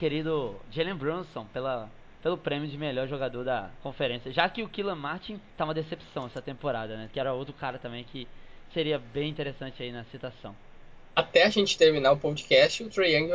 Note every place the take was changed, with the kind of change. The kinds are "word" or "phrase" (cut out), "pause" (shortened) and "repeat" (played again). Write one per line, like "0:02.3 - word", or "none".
0:05.5 - pause